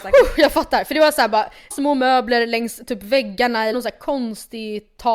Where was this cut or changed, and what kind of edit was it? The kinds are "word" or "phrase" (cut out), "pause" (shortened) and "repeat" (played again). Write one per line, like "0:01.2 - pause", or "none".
0:01.7 - word
0:03.7 - phrase